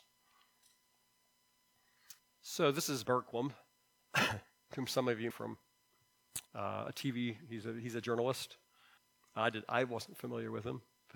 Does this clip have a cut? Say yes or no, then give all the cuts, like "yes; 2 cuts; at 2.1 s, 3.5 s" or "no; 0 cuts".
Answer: yes; 5 cuts; at 2.2 s, 3.1 s, 5.3 s, 6.5 s, 9.0 s